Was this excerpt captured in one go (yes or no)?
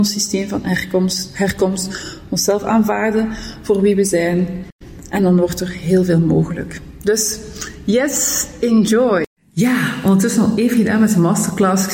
no